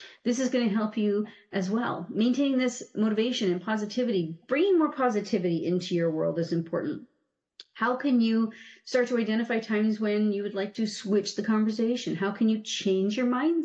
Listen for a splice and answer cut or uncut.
uncut